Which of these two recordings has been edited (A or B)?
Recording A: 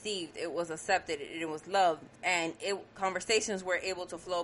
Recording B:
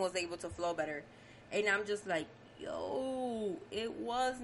A